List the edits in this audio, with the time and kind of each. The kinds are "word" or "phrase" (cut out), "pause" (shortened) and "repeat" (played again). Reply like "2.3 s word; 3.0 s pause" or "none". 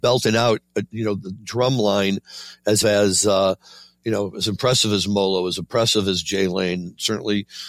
2.8 s word